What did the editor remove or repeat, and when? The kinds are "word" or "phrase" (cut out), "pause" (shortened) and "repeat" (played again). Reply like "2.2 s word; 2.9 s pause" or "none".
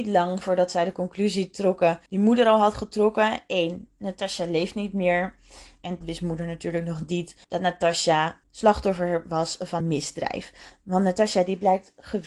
2.1 s pause; 6.0 s phrase; 7.4 s pause; 8.4 s pause; 9.8 s word